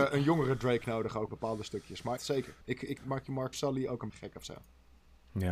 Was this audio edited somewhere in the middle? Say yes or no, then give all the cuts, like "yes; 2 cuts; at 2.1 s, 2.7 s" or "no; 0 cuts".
yes; 6 cuts; at 1.3 s, 2.2 s, 2.6 s, 3.0 s, 3.5 s, 4.1 s